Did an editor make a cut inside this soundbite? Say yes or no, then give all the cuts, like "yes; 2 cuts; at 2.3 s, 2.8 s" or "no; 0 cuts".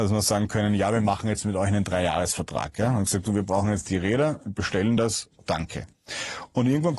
no; 0 cuts